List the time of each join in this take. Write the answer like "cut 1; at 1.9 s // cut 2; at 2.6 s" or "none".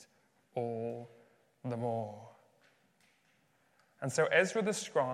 none